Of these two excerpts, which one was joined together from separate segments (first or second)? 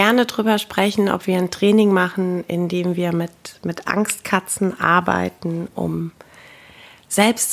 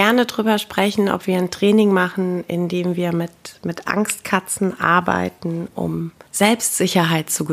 second